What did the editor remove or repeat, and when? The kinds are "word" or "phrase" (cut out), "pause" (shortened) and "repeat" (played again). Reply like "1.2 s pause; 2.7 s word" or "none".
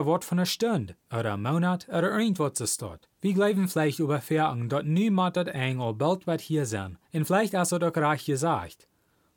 3.1 s pause; 7.0 s pause